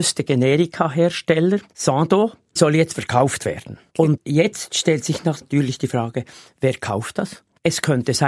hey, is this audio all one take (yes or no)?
yes